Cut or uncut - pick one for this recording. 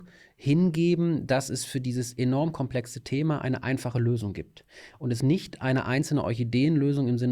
cut